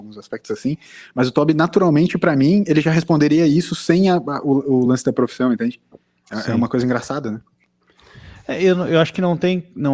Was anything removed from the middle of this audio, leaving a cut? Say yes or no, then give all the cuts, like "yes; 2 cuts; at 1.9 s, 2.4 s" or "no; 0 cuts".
no; 0 cuts